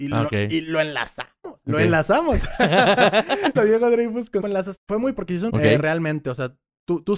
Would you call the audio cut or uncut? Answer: cut